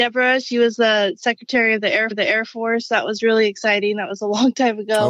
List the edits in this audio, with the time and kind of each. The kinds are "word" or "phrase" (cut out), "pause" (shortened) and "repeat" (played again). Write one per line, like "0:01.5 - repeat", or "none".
0:02.1 - repeat